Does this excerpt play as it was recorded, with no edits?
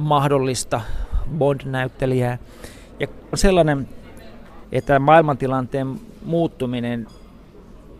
no; 3 cuts; at 1.3 s, 3.3 s, 4.6 s

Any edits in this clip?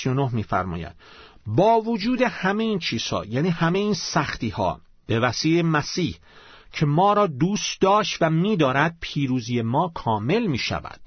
no; 0 cuts

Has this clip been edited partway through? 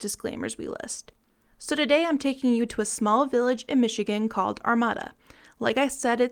no; 0 cuts

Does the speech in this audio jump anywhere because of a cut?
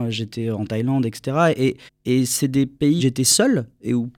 yes; 2 cuts; at 1.9 s, 3.0 s

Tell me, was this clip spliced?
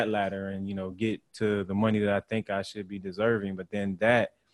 no; 0 cuts

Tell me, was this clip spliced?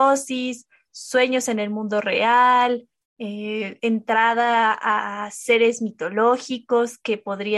no; 0 cuts

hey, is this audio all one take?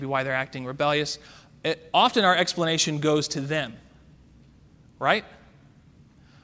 yes; 0 cuts

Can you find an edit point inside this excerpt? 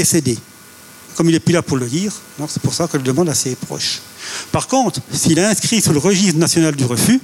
no; 0 cuts

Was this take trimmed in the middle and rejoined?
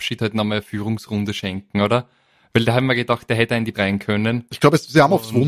yes; 1 cut; at 3.7 s

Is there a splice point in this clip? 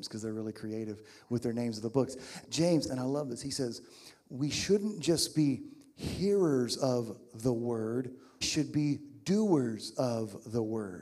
yes; 3 cuts; at 2.4 s, 2.9 s, 8.4 s

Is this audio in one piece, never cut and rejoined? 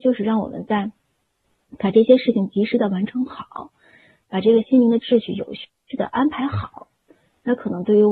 yes; 0 cuts

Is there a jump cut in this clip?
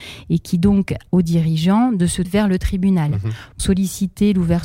yes; 3 cuts; at 1.1 s, 2.2 s, 3.6 s

